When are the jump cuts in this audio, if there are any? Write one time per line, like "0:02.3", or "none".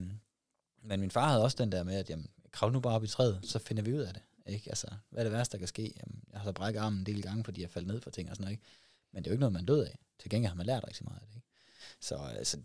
none